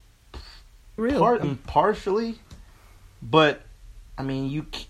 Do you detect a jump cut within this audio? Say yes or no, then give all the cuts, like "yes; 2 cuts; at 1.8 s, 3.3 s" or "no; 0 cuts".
yes; 2 cuts; at 1.0 s, 1.4 s